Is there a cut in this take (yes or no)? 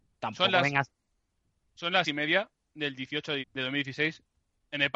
yes